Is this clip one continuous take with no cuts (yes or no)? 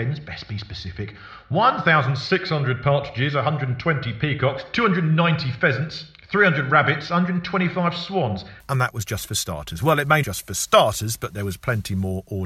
no